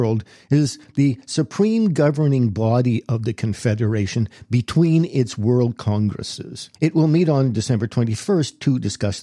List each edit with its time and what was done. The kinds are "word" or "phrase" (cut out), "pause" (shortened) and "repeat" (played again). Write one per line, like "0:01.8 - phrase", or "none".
0:06.8 - pause